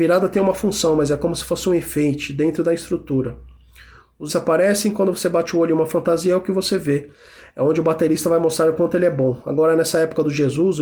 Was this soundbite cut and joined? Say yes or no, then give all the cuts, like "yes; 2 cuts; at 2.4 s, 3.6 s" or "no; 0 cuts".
yes; 1 cut; at 4.3 s